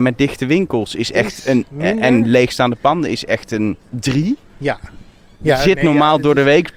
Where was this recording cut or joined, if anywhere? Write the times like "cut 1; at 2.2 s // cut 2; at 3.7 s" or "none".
cut 1; at 3.8 s